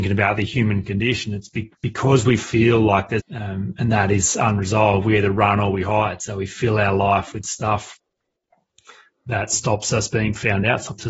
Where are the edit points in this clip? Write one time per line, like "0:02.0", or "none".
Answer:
0:03.2